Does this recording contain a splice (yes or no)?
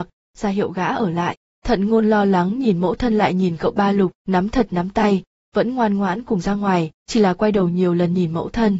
yes